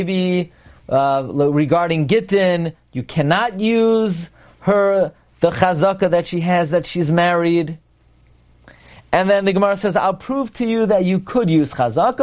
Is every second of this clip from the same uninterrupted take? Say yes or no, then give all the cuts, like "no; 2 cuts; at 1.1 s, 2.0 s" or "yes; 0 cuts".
yes; 0 cuts